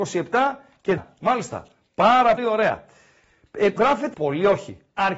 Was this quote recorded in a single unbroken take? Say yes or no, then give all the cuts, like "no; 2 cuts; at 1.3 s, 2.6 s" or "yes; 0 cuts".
no; 4 cuts; at 1.0 s, 2.4 s, 3.8 s, 4.1 s